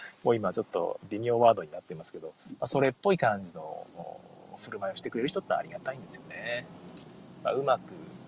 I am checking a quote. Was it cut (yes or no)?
yes